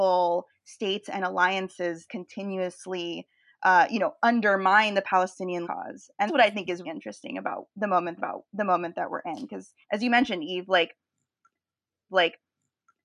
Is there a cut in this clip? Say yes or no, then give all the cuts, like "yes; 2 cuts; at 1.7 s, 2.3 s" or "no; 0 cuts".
yes; 7 cuts; at 2.1 s, 5.6 s, 6.3 s, 6.8 s, 8.2 s, 9.8 s, 12.1 s